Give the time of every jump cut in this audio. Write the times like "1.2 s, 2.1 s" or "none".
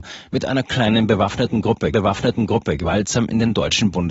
1.9 s